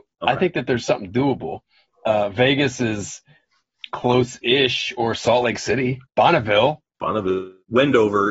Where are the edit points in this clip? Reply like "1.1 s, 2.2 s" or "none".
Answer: none